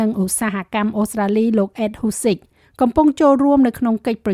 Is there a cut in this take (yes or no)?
no